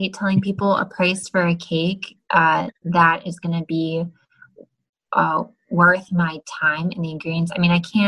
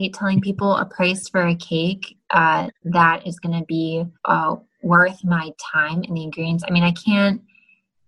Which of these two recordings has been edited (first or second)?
second